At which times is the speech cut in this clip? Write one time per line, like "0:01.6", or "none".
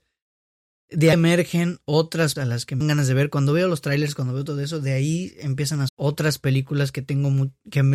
0:01.1
0:02.4
0:02.8
0:05.9